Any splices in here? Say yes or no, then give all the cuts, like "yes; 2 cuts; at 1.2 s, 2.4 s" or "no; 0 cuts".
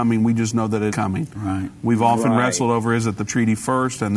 yes; 2 cuts; at 0.9 s, 3.3 s